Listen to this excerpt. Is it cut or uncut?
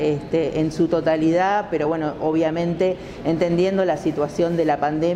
uncut